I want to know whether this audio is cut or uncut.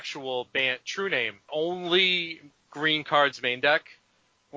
cut